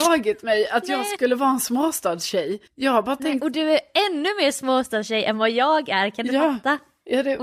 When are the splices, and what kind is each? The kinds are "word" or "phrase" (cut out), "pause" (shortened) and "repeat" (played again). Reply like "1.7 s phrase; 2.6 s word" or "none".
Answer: 2.7 s pause